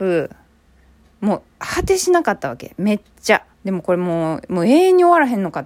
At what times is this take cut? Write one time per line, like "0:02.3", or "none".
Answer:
0:03.1
0:03.5

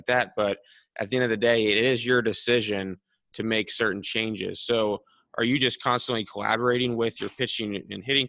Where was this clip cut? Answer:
none

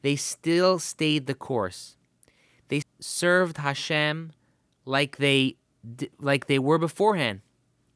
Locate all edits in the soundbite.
0:02.8

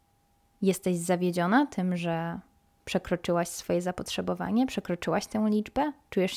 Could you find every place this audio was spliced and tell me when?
none

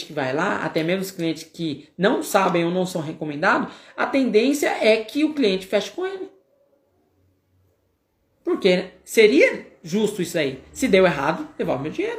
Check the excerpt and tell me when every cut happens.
none

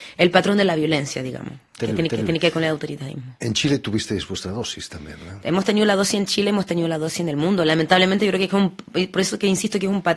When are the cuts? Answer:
0:02.1

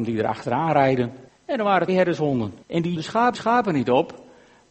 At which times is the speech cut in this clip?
0:01.3
0:01.9
0:02.6
0:03.0
0:03.3

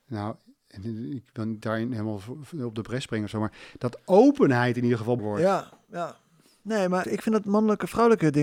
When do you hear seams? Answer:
0:01.6
0:05.2
0:07.0

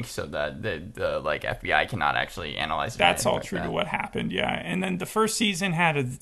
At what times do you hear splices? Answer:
none

